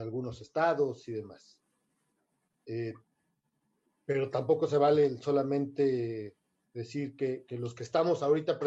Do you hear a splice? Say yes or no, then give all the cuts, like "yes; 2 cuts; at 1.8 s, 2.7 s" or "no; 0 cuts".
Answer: no; 0 cuts